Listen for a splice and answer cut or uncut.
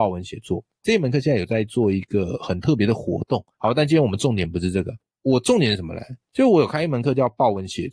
cut